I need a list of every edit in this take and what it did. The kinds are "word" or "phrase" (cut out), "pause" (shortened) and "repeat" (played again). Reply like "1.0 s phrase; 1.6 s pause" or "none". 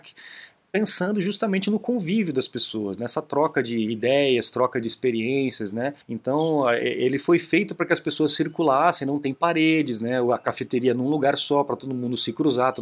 6.0 s pause